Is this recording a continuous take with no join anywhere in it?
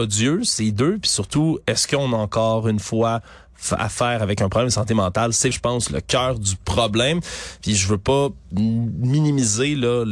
no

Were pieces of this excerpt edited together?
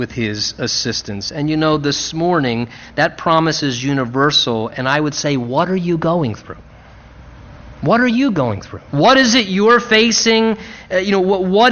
yes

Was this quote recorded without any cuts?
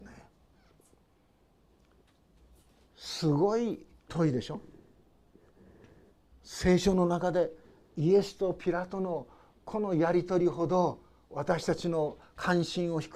yes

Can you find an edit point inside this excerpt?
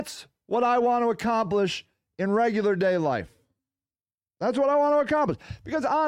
no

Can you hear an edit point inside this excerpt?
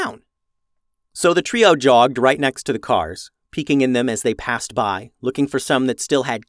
no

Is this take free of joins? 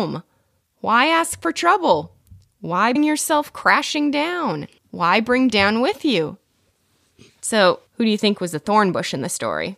no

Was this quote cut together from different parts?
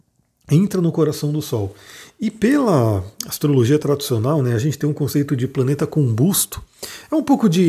no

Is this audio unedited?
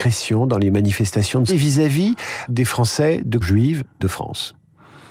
no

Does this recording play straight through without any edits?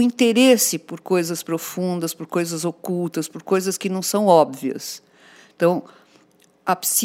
yes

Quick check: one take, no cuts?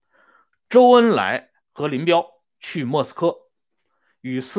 no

